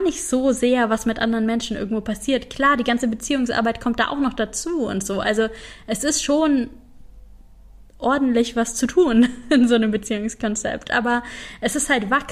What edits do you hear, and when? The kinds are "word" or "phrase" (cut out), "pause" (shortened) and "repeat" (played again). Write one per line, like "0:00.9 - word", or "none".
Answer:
0:07.9 - pause